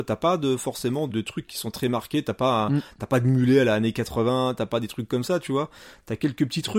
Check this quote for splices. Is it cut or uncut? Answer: cut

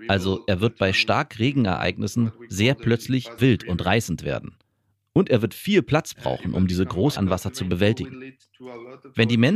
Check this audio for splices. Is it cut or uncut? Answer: cut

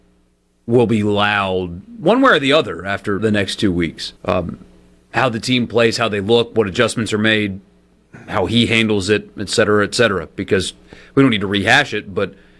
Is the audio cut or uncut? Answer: cut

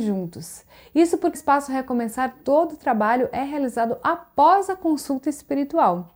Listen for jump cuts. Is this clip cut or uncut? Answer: cut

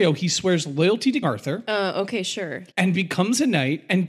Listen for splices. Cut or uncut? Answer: cut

